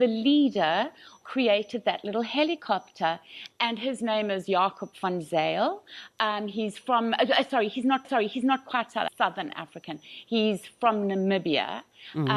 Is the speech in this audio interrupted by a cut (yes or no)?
yes